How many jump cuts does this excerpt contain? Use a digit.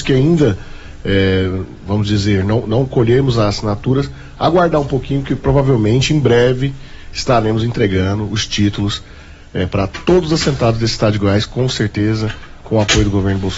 0